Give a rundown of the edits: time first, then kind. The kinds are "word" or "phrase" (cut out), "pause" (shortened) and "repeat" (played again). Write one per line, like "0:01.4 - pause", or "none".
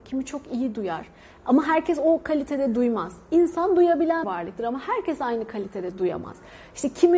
0:04.2 - word